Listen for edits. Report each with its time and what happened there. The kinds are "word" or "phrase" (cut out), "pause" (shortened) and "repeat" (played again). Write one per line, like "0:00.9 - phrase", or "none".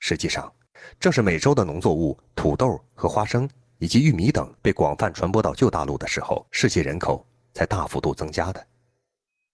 0:04.6 - pause
0:06.5 - pause